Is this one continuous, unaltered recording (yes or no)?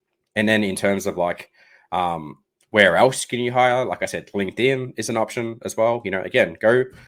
yes